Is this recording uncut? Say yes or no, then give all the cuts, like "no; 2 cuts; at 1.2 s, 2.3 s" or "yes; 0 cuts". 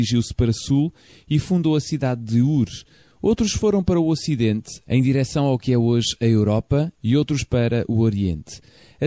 yes; 0 cuts